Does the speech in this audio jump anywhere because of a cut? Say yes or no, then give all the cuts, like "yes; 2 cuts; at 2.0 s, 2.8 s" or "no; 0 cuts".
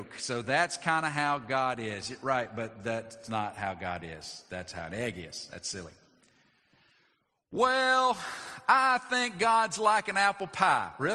no; 0 cuts